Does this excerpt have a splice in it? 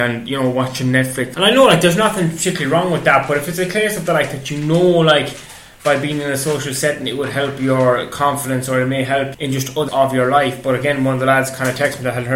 yes; 3 cuts; at 1.3 s, 9.3 s, 9.9 s

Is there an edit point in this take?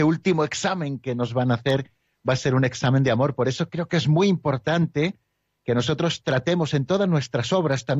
no; 0 cuts

